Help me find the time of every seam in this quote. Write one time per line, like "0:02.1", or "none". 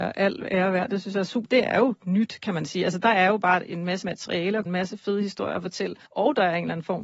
0:01.4
0:04.0
0:04.7
0:06.0